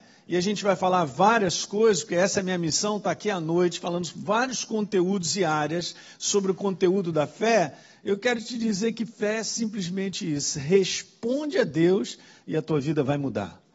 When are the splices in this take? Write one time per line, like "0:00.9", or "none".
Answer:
none